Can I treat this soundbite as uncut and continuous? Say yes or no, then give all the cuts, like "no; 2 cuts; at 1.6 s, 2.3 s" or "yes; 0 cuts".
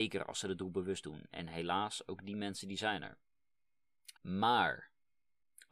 no; 1 cut; at 4.2 s